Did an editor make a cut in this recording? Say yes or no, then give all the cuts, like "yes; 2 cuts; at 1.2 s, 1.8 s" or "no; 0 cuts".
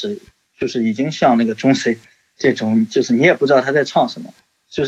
no; 0 cuts